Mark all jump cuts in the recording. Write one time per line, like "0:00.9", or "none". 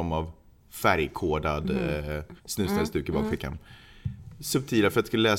0:02.4